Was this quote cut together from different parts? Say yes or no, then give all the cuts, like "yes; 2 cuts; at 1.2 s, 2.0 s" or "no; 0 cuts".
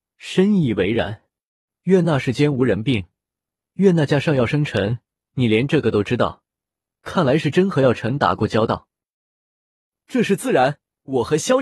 no; 0 cuts